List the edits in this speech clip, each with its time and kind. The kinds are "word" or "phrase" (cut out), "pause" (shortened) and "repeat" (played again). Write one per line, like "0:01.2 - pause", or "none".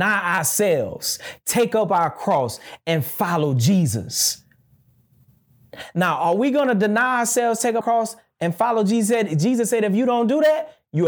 0:07.8 - word